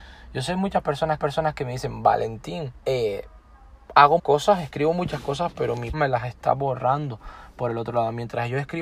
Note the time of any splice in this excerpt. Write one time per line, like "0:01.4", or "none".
0:01.2
0:02.8
0:04.2
0:05.9